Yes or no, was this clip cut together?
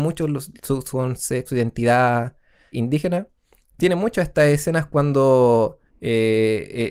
yes